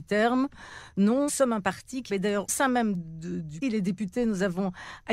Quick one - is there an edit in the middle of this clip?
yes; 5 cuts; at 1.3 s, 2.1 s, 2.5 s, 2.9 s, 3.6 s

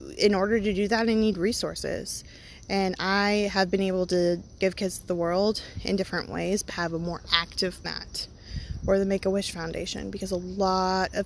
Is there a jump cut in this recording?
yes; 3 cuts; at 4.6 s, 6.7 s, 7.8 s

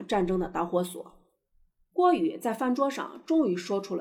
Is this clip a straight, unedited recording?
yes; 0 cuts

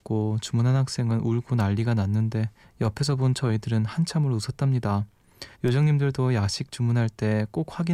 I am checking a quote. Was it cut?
yes; 2 cuts; at 2.6 s, 5.5 s

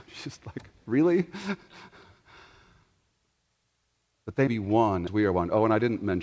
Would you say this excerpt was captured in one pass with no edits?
no; 2 cuts; at 4.5 s, 5.1 s

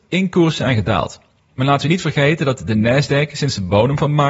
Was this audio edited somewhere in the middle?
no; 0 cuts

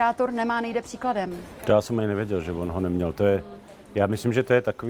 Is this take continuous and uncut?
yes; 0 cuts

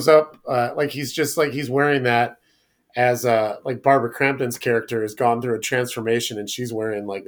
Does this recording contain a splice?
no; 0 cuts

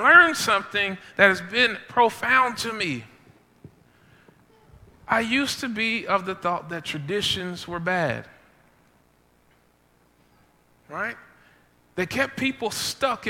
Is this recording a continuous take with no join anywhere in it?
yes; 0 cuts

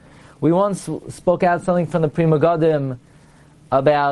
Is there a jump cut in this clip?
no; 0 cuts

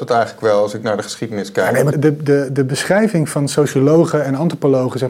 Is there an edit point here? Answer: yes; 1 cut; at 1.9 s

